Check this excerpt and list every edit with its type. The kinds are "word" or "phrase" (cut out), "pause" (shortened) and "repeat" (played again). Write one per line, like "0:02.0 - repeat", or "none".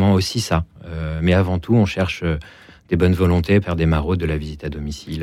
0:03.6 - word